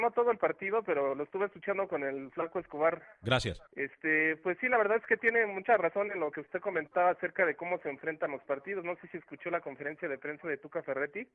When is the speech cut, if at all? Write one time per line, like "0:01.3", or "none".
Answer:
0:03.7